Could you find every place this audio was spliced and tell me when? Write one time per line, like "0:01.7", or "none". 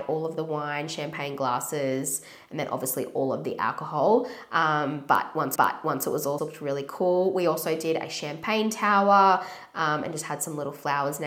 0:05.6
0:06.4

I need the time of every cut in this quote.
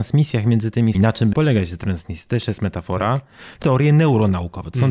0:00.9
0:01.3
0:03.6

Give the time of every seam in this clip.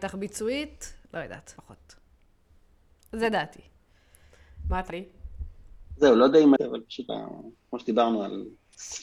0:01.0
0:01.6
0:04.9
0:06.6
0:07.1

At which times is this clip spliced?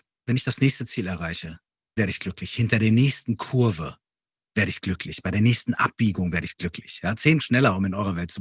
0:02.0
0:07.4

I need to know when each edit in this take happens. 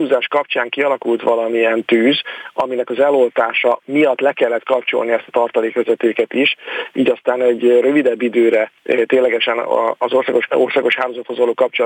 0:08.8
0:10.5

